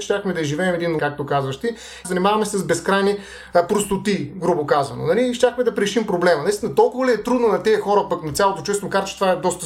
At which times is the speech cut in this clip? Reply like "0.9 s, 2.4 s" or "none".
1.0 s, 2.0 s